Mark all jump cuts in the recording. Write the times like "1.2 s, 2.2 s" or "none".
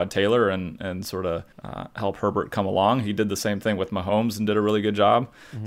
1.5 s